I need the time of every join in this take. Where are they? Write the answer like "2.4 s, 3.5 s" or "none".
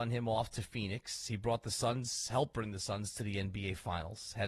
none